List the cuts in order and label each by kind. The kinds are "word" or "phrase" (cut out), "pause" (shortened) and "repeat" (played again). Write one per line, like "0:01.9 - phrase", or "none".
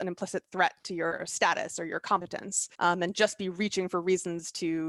0:02.7 - pause

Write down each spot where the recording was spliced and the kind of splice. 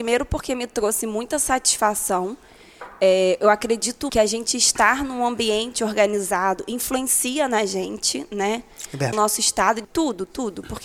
0:04.1 - word
0:09.1 - word
0:09.8 - word

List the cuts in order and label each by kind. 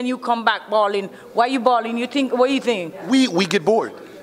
none

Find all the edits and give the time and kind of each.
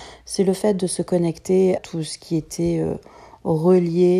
0:01.8 - word

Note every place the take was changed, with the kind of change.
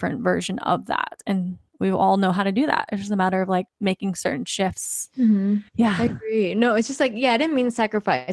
0:03.7 - pause
0:05.7 - pause

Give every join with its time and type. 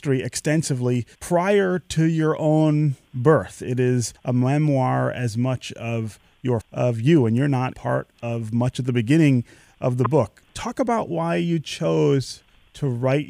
0:01.1 - pause
0:04.2 - pause
0:06.6 - phrase
0:07.7 - word

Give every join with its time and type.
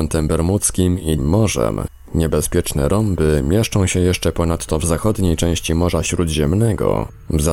0:01.2 - word

